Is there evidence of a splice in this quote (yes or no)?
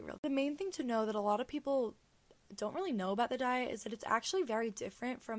no